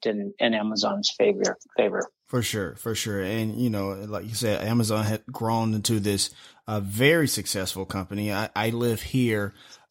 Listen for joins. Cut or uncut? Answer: uncut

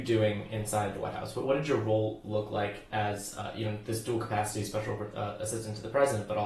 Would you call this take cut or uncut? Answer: uncut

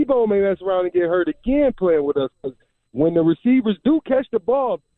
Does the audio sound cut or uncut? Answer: uncut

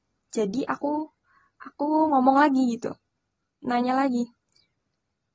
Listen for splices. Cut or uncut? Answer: uncut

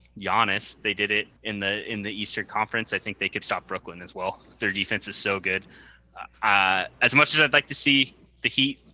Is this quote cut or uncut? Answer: cut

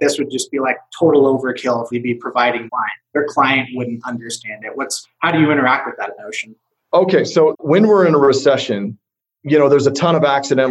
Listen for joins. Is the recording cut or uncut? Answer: cut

